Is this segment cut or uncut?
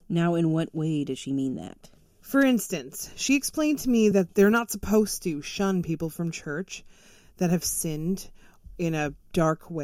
uncut